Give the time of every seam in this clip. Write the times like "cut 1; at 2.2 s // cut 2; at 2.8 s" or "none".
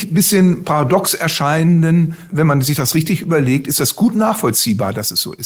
cut 1; at 2.3 s